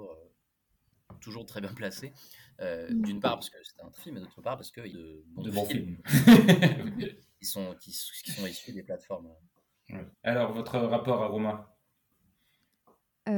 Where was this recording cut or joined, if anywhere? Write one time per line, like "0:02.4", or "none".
0:04.0
0:04.9
0:10.1